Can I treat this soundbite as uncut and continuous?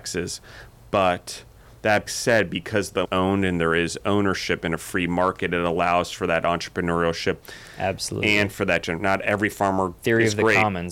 no; 2 cuts; at 2.1 s, 3.1 s

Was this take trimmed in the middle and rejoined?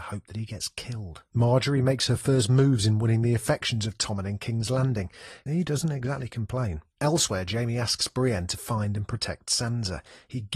yes; 2 cuts; at 1.3 s, 6.9 s

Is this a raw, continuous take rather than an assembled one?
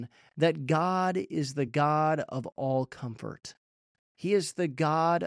yes; 0 cuts

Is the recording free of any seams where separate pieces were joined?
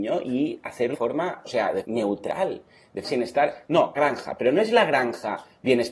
no; 5 cuts; at 0.9 s, 1.4 s, 1.8 s, 3.0 s, 4.0 s

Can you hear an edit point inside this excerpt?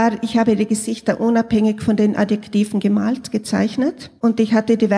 no; 0 cuts

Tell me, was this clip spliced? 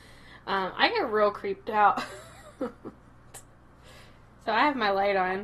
no; 0 cuts

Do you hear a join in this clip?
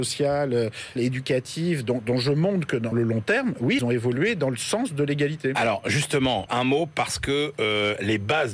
yes; 4 cuts; at 1.0 s, 2.9 s, 3.8 s, 6.5 s

